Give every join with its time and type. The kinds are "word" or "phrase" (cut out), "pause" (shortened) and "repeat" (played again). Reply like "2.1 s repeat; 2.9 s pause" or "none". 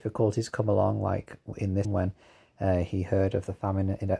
1.8 s word